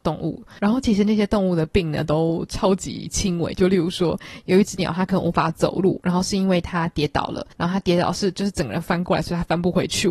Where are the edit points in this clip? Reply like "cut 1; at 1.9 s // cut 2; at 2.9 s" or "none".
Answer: cut 1; at 7.5 s

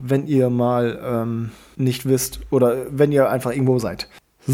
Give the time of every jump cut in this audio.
none

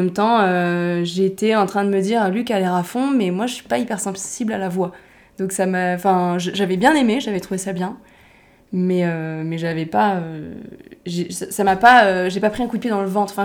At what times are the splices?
none

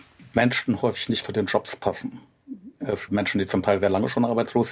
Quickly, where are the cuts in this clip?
cut 1; at 1.2 s // cut 2; at 3.1 s

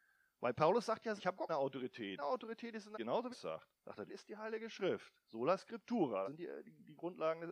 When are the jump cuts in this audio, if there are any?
cut 1; at 1.2 s // cut 2; at 1.5 s // cut 3; at 2.2 s // cut 4; at 2.9 s // cut 5; at 3.3 s // cut 6; at 3.8 s // cut 7; at 4.1 s // cut 8; at 6.2 s

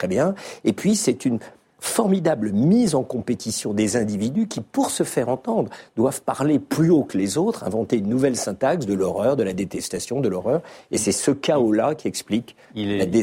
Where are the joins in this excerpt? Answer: none

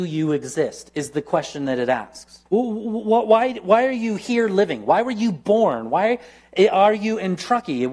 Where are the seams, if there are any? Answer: cut 1; at 2.5 s

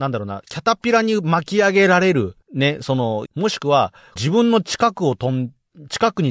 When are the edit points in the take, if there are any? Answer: cut 1; at 2.4 s // cut 2; at 3.3 s // cut 3; at 4.2 s

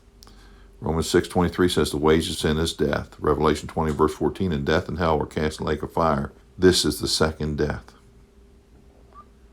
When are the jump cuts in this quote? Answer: cut 1; at 2.3 s // cut 2; at 6.4 s

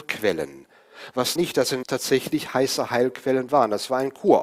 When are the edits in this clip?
cut 1; at 1.4 s // cut 2; at 1.8 s

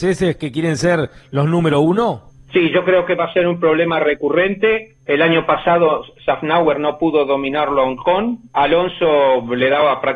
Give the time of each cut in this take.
cut 1; at 2.3 s // cut 2; at 5.0 s // cut 3; at 8.5 s

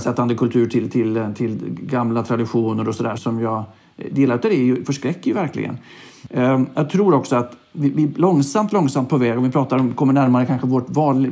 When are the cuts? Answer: cut 1; at 3.2 s

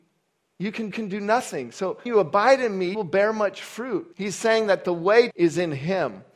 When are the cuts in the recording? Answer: cut 1; at 0.9 s // cut 2; at 2.1 s // cut 3; at 2.9 s // cut 4; at 4.1 s // cut 5; at 5.3 s

